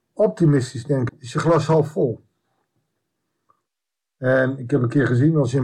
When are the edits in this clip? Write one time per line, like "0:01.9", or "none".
0:01.1